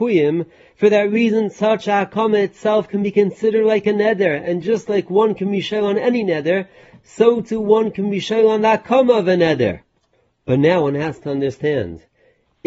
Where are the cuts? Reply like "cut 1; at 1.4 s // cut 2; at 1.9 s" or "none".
none